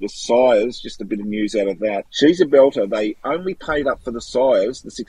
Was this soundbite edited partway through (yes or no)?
yes